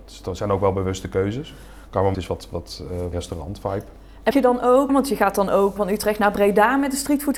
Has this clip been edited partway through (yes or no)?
yes